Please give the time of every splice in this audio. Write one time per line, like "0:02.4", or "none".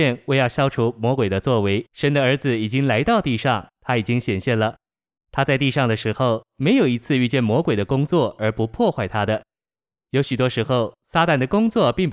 0:01.9

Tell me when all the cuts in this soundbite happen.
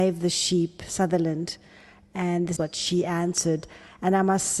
0:02.6

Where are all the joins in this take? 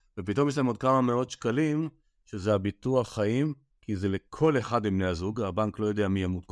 none

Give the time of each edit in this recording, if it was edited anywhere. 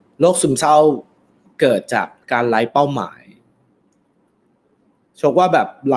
0:02.2

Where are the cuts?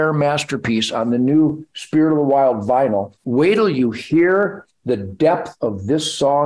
0:03.2

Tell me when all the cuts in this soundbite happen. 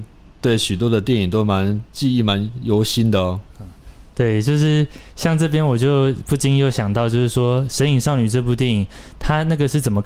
0:01.9

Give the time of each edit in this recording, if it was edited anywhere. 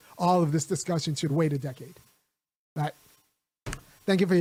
none

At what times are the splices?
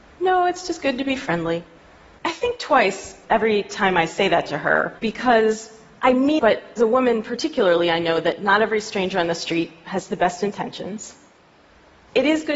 0:01.9
0:05.0
0:06.4
0:06.8

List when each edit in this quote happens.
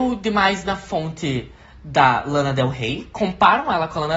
none

